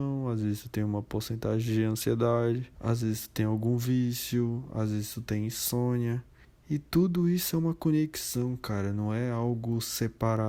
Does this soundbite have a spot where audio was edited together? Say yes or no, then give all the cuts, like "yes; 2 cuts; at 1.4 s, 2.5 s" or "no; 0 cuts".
yes; 2 cuts; at 2.7 s, 6.4 s